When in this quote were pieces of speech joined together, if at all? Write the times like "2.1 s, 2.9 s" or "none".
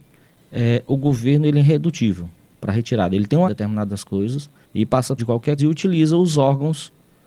2.5 s, 3.4 s, 4.6 s, 5.2 s, 5.6 s